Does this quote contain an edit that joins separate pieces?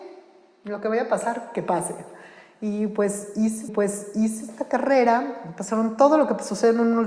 yes; 1 cut; at 3.7 s

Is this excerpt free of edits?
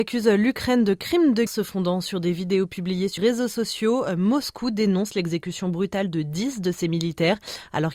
no; 2 cuts; at 1.5 s, 3.2 s

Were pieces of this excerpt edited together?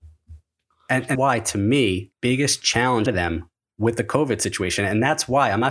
yes; 3 cuts; at 1.1 s, 2.1 s, 3.1 s

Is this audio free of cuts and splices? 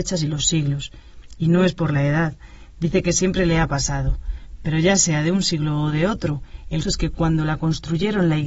no; 1 cut; at 6.8 s

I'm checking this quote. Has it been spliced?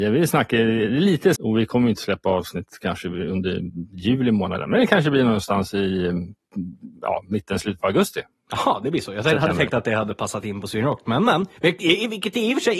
yes; 2 cuts; at 1.4 s, 11.6 s

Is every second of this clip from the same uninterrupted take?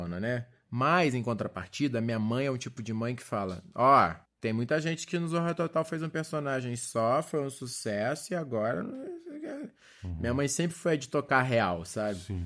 no; 1 cut; at 4.2 s

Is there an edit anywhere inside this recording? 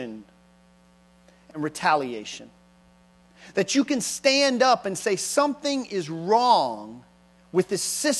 no; 0 cuts

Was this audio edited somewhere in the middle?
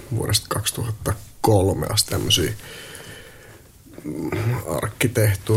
yes; 1 cut; at 2.1 s

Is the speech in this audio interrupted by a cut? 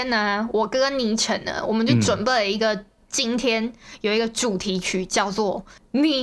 no; 0 cuts

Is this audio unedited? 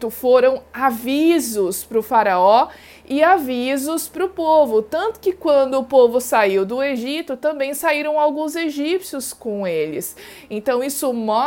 yes; 0 cuts

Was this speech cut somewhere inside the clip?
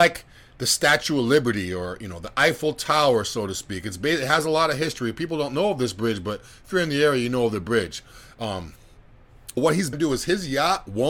yes; 2 cuts; at 9.6 s, 9.9 s

